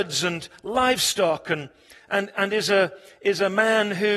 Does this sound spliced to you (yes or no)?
no